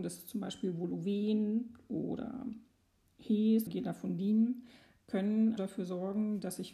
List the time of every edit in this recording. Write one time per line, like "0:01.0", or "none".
0:03.7
0:05.0
0:05.6